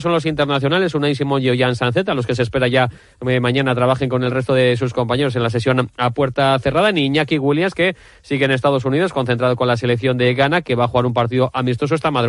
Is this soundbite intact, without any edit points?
yes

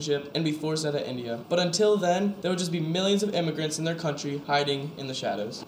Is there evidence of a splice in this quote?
no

